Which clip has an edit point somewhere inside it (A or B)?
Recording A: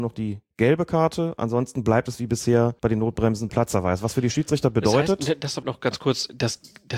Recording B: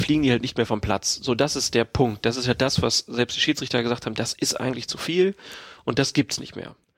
A